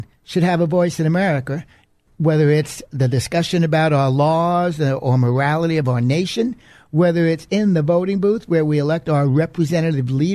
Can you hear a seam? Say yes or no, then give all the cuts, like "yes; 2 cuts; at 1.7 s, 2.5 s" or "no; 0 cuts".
no; 0 cuts